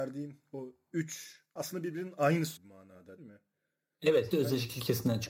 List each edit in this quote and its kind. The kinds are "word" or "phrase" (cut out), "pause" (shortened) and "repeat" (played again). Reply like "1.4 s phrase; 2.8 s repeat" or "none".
1.6 s word; 2.6 s word; 3.2 s word; 4.3 s word